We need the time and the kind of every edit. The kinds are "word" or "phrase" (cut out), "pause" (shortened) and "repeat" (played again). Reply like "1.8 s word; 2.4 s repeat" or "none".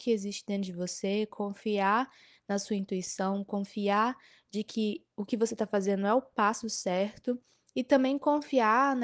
none